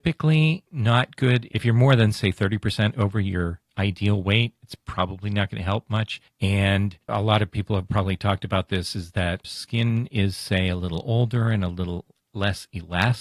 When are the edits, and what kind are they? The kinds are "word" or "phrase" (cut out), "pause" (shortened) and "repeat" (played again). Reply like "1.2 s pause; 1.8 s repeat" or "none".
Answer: 9.4 s phrase